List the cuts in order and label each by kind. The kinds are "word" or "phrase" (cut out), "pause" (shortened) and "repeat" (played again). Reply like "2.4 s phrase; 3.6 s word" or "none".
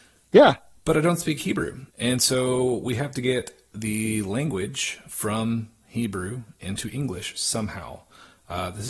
1.9 s pause